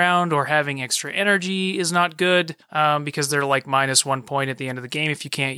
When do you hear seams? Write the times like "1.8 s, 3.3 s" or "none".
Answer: none